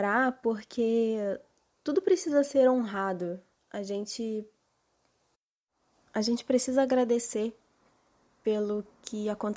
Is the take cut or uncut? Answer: uncut